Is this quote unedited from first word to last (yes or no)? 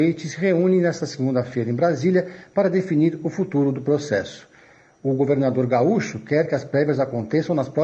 yes